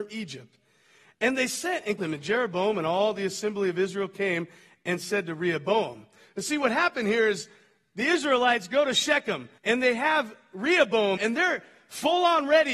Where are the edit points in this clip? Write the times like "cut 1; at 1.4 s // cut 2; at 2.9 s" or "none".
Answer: cut 1; at 2.0 s // cut 2; at 9.6 s // cut 3; at 11.2 s

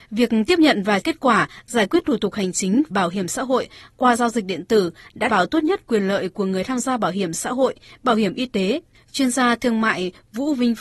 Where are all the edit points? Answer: cut 1; at 1.0 s // cut 2; at 2.9 s // cut 3; at 5.3 s

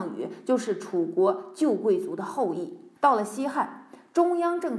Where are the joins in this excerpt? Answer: cut 1; at 3.0 s

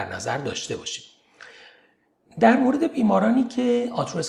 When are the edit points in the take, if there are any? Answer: none

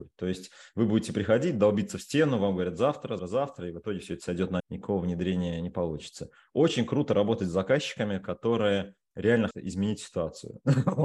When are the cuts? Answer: cut 1; at 3.2 s // cut 2; at 4.6 s // cut 3; at 9.5 s

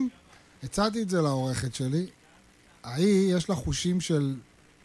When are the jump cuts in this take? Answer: none

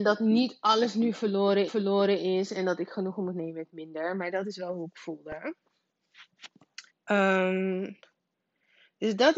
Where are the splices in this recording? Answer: cut 1; at 1.7 s // cut 2; at 6.9 s

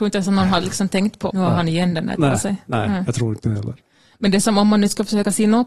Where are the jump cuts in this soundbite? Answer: cut 1; at 1.3 s // cut 2; at 2.2 s

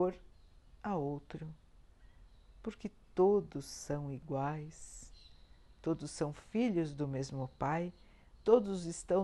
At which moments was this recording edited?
none

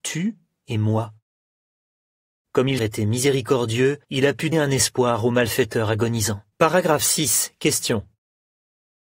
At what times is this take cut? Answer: cut 1; at 2.8 s // cut 2; at 4.0 s // cut 3; at 4.5 s // cut 4; at 6.5 s

